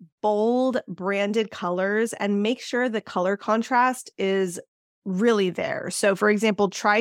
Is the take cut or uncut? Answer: uncut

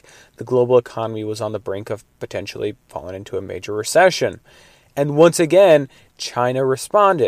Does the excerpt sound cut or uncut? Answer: uncut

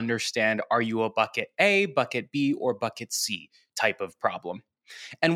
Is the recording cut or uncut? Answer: uncut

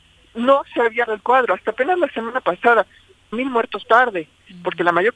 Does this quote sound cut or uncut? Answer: cut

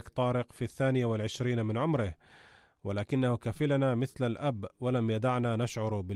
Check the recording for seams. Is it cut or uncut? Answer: uncut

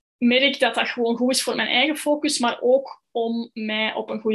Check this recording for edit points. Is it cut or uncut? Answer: uncut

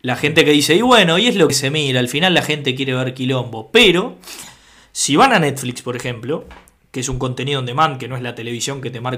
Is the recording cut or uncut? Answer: uncut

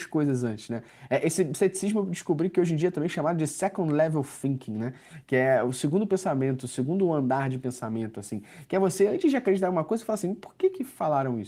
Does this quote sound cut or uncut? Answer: uncut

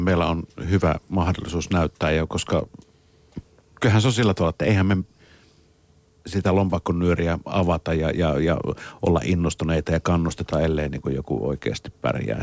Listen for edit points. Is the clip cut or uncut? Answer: uncut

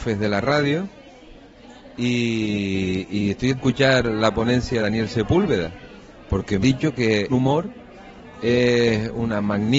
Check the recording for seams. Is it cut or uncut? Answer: cut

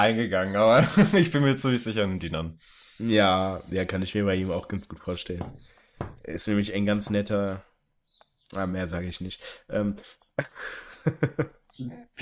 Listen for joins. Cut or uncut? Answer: uncut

